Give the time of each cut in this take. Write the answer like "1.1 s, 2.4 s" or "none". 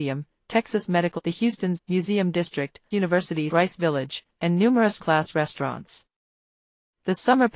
1.2 s, 1.8 s, 2.9 s, 3.5 s, 5.0 s